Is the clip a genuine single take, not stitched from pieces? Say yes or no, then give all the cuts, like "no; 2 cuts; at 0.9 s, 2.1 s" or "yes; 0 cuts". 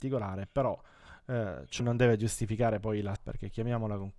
no; 2 cuts; at 1.8 s, 3.2 s